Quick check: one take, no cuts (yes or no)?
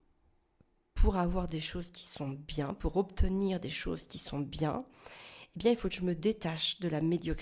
yes